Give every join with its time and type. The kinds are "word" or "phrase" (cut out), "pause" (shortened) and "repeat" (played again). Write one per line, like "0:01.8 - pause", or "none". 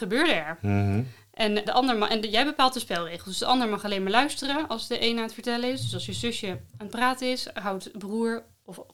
0:01.6 - word